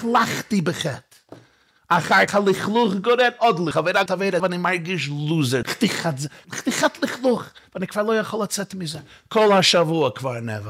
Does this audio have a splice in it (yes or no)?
yes